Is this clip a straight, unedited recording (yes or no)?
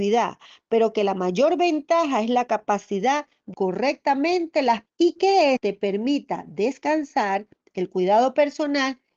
no